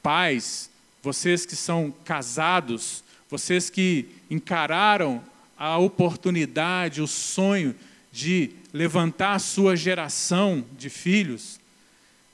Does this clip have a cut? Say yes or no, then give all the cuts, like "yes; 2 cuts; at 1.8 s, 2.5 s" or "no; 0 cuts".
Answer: no; 0 cuts